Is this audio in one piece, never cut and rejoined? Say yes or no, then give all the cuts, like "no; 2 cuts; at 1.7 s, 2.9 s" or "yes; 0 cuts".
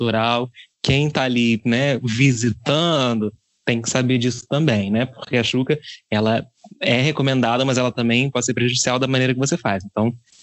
yes; 0 cuts